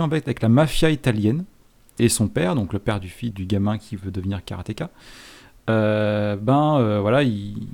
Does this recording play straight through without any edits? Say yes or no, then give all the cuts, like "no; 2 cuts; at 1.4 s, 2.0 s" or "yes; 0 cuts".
no; 2 cuts; at 2.0 s, 3.3 s